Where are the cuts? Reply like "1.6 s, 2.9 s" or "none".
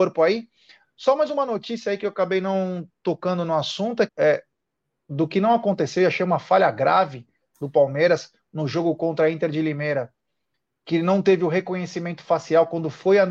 4.1 s